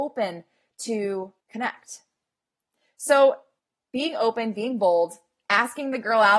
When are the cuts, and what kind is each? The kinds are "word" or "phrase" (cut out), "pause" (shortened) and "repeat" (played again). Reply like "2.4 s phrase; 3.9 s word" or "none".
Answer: 1.4 s pause; 3.6 s pause